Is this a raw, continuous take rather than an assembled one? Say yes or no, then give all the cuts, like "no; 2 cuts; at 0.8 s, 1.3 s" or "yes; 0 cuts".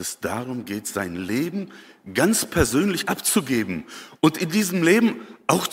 no; 1 cut; at 3.1 s